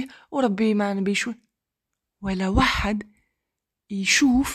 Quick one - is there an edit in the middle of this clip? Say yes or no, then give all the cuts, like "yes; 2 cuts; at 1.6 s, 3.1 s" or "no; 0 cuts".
no; 0 cuts